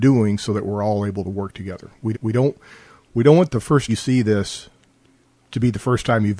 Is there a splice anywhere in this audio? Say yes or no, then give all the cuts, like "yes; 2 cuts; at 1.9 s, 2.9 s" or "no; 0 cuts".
yes; 3 cuts; at 2.1 s, 3.9 s, 5.2 s